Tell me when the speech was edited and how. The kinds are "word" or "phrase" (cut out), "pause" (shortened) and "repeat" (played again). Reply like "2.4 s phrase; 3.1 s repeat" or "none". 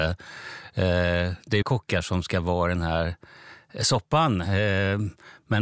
1.6 s word